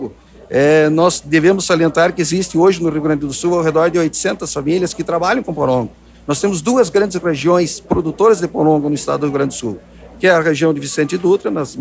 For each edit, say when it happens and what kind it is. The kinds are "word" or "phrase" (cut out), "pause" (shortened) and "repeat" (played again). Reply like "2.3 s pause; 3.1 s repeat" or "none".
none